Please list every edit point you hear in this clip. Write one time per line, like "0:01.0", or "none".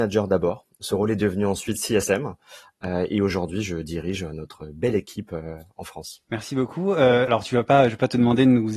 none